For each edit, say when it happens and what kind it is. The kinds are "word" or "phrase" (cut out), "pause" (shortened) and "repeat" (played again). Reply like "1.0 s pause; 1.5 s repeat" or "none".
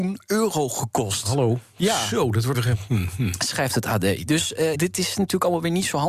2.5 s word; 4.7 s word